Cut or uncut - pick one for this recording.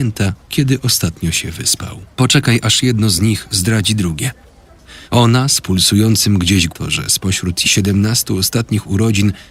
cut